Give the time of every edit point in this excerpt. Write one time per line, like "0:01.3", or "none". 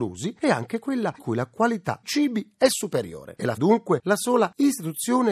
0:01.2
0:02.0
0:03.6